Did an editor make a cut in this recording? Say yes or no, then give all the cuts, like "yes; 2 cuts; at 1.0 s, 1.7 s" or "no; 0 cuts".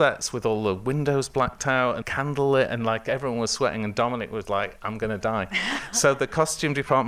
yes; 2 cuts; at 2.0 s, 4.4 s